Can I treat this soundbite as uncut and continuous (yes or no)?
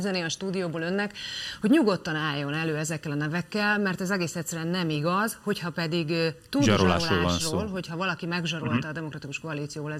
yes